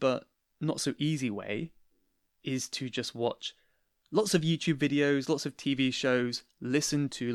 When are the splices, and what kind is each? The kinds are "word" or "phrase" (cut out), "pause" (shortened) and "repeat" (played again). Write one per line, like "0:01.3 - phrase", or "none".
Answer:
none